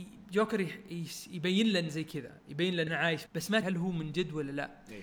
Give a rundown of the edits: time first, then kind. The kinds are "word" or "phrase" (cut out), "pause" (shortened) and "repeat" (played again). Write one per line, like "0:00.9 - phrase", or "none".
0:01.9 - word
0:02.9 - word
0:03.3 - phrase
0:03.6 - word

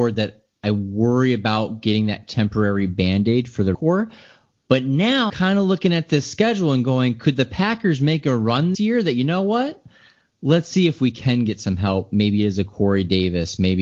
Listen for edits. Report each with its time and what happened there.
0:03.7 - word
0:05.3 - word
0:08.7 - word

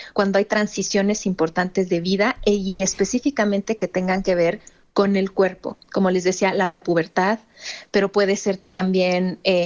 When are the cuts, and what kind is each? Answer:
none

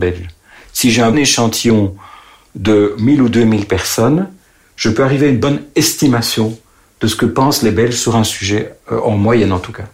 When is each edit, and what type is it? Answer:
0:01.1 - word

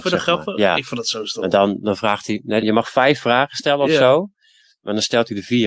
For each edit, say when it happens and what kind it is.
0:02.6 - word

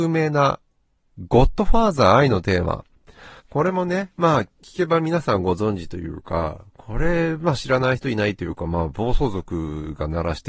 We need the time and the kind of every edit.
0:03.4 - pause

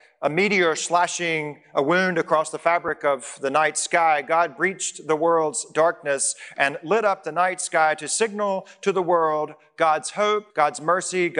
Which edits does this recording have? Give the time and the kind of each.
0:10.5 - pause

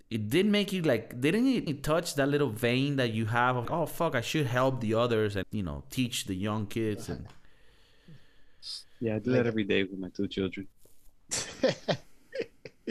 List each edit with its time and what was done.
0:01.7 - word
0:03.6 - word
0:05.4 - word
0:10.7 - pause

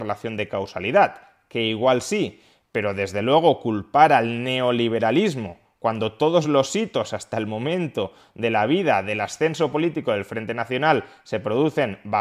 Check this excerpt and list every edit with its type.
none

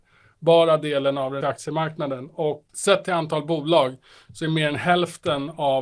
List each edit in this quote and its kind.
0:01.4 - word
0:02.7 - word

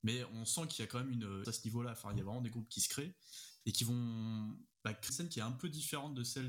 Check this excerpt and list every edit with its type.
0:01.4 - word
0:04.7 - pause
0:05.1 - word

